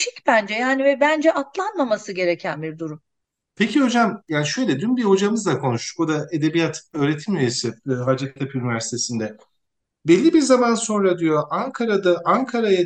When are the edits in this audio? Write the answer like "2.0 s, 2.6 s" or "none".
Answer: none